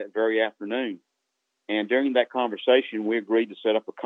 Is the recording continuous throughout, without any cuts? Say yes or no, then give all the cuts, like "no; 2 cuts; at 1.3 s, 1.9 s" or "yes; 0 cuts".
yes; 0 cuts